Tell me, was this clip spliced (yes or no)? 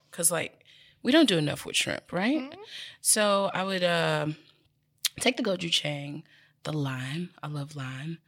no